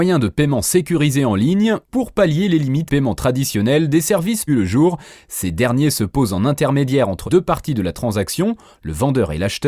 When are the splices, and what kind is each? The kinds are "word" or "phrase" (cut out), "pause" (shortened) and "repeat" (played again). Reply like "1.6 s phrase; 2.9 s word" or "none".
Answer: 1.8 s pause; 2.9 s phrase; 4.5 s phrase; 7.3 s word